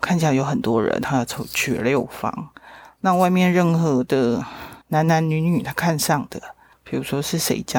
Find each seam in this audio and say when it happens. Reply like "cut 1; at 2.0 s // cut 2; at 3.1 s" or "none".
cut 1; at 4.8 s // cut 2; at 6.7 s